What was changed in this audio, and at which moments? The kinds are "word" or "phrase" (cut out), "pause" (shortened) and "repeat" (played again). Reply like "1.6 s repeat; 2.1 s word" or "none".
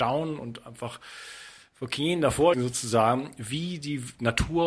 2.5 s word